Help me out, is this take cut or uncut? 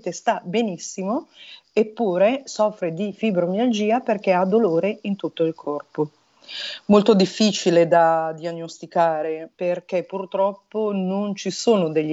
cut